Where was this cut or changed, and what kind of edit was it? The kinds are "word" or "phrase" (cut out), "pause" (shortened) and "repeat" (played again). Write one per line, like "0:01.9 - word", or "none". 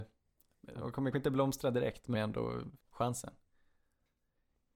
0:01.1 - word
0:02.1 - phrase
0:02.8 - pause